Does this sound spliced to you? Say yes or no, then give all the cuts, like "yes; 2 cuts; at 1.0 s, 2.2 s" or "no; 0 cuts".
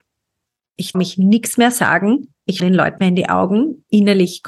yes; 3 cuts; at 0.9 s, 2.6 s, 3.0 s